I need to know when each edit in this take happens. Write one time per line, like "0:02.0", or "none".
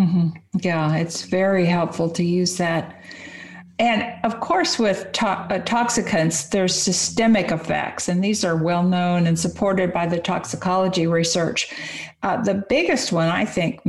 none